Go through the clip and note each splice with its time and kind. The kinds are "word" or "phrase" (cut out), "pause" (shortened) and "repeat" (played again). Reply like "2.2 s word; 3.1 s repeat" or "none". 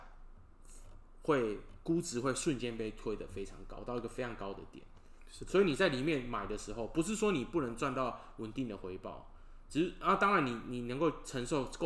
none